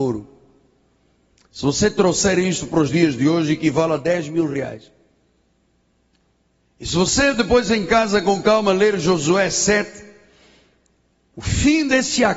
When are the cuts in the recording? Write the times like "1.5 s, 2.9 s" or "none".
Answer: none